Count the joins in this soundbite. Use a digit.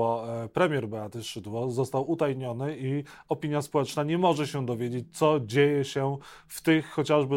0